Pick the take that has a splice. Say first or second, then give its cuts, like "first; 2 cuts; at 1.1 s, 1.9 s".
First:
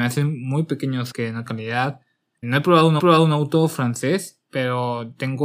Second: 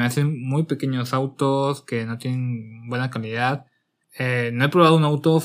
first; 5 cuts; at 1.1 s, 1.5 s, 2.4 s, 3.0 s, 4.5 s